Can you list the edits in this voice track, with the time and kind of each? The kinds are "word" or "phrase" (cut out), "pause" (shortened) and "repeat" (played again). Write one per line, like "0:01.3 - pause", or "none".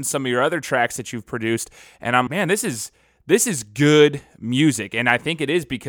0:02.3 - word